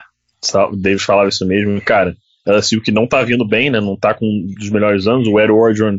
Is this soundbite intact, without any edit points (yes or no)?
yes